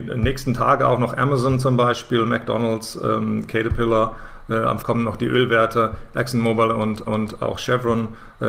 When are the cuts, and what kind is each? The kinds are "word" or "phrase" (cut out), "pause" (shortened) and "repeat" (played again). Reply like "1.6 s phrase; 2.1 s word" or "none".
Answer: 4.8 s word; 7.1 s repeat